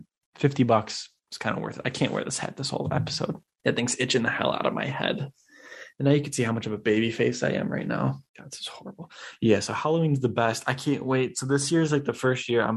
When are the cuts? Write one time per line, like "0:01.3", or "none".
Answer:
0:03.5
0:08.3